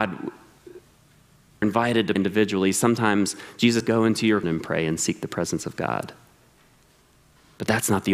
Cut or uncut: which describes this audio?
cut